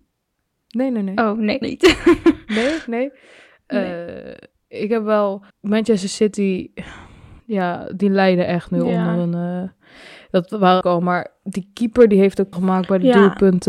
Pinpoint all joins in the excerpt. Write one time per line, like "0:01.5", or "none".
0:01.6
0:05.5
0:07.4
0:10.8
0:12.5